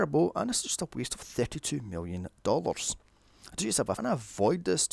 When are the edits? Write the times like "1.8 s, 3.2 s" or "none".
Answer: 2.4 s, 4.0 s